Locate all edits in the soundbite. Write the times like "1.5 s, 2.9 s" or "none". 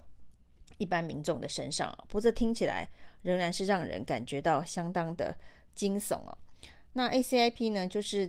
none

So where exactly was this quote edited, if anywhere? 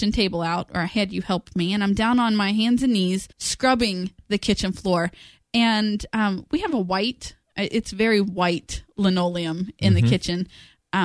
3.3 s

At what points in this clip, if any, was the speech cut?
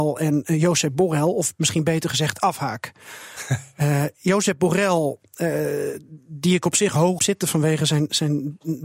7.2 s

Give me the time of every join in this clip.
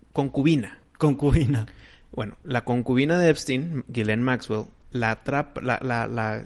none

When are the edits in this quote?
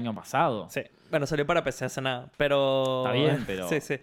none

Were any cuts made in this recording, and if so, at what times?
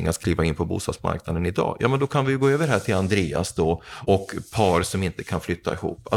4.1 s

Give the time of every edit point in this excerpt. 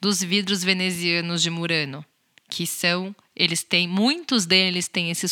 none

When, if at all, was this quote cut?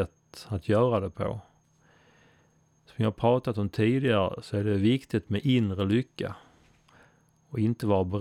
none

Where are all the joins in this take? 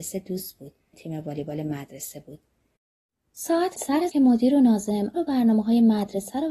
0.9 s, 3.8 s, 4.1 s, 5.1 s

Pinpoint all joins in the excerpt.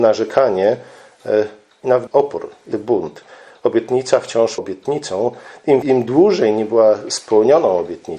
2.1 s, 2.7 s, 4.6 s, 5.8 s

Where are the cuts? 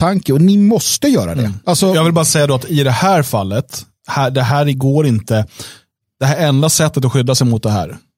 none

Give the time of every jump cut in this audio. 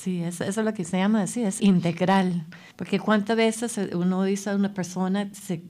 1.6 s, 2.7 s

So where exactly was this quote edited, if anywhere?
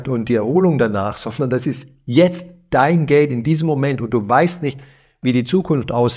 none

